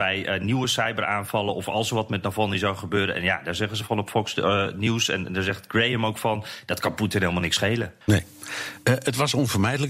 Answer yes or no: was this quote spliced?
yes